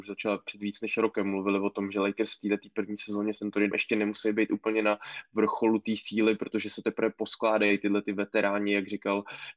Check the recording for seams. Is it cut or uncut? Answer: cut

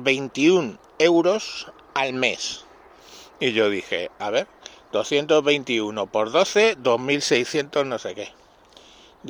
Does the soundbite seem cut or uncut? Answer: uncut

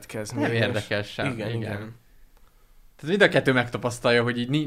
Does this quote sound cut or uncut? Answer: uncut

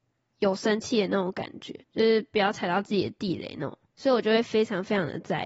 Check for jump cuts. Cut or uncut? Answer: cut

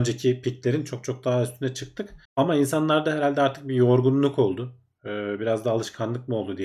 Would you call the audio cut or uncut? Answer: cut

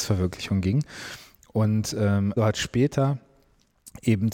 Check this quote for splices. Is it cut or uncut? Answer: cut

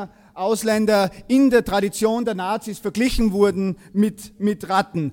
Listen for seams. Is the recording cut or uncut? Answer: uncut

